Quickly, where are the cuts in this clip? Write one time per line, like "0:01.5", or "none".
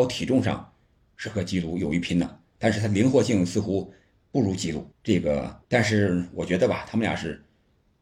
0:04.9
0:05.6